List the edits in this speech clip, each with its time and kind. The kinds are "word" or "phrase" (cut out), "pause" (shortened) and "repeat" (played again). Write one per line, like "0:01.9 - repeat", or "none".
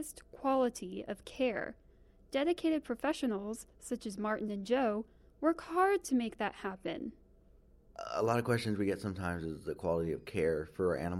none